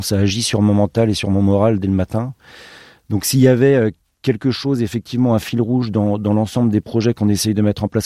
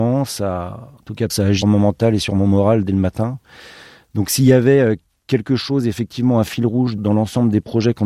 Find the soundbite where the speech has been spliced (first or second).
second